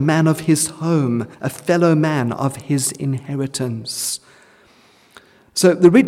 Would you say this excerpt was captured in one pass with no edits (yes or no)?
no